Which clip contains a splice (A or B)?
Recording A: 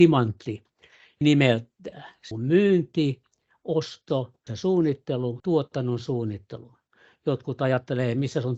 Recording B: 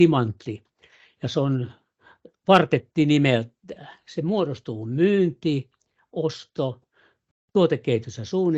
A